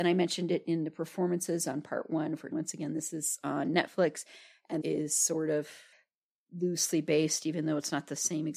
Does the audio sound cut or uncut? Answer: cut